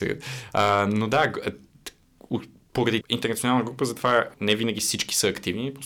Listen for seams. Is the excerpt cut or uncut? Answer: cut